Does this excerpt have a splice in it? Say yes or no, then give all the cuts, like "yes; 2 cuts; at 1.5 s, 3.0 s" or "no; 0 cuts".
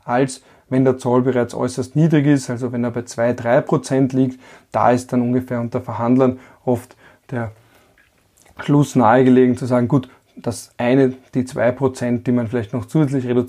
no; 0 cuts